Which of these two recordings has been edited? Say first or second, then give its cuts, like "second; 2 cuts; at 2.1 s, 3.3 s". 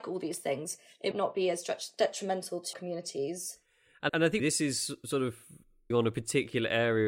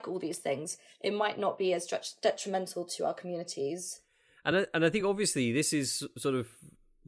first; 5 cuts; at 1.1 s, 2.7 s, 4.1 s, 4.4 s, 5.9 s